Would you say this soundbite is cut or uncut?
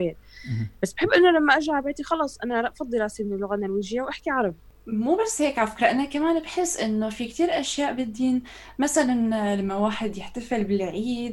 uncut